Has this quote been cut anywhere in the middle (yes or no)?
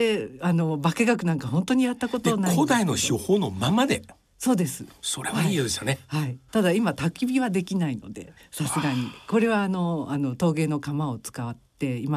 yes